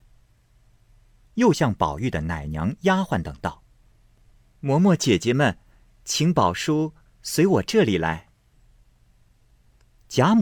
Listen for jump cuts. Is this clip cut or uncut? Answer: uncut